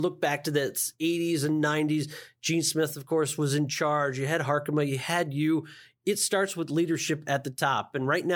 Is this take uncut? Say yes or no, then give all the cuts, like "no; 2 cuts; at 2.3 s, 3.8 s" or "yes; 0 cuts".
yes; 0 cuts